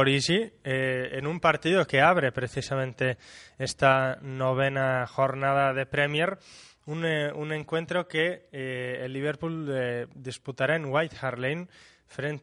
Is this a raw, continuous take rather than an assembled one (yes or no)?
yes